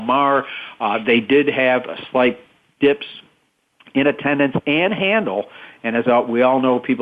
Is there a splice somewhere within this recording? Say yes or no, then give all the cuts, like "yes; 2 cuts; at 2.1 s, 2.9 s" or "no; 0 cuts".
no; 0 cuts